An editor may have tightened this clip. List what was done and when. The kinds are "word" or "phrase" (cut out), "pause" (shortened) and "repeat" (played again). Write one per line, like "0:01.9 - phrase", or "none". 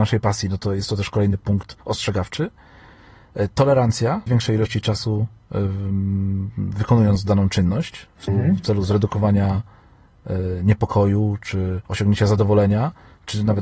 0:01.8 - pause
0:04.3 - phrase
0:08.3 - word
0:11.9 - pause